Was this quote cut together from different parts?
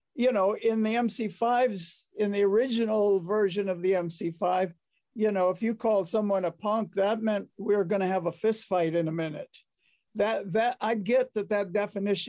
no; 0 cuts

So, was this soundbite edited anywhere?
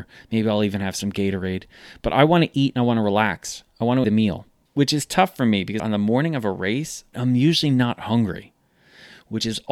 yes; 4 cuts; at 4.0 s, 4.7 s, 5.8 s, 7.1 s

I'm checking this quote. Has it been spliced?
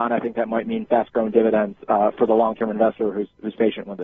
no; 0 cuts

